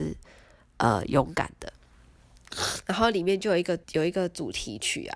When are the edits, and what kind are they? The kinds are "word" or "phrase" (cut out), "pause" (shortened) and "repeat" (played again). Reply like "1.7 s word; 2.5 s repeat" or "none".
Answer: 3.8 s pause